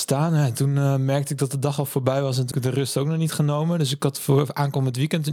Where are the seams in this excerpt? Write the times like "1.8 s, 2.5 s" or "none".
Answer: 2.5 s